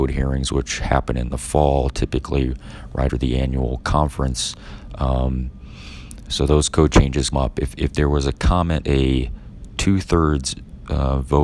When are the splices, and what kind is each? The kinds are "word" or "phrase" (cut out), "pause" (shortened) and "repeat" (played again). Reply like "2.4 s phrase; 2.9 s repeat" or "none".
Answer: 3.1 s word; 7.3 s word; 8.8 s phrase